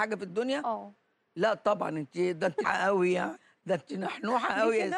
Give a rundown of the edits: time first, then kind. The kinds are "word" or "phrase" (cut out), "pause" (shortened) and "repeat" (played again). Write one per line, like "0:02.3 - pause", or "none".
0:02.6 - word